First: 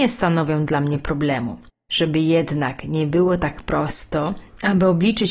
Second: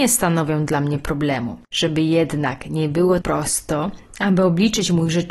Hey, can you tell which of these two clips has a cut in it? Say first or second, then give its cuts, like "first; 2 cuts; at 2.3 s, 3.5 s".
second; 2 cuts; at 1.6 s, 3.2 s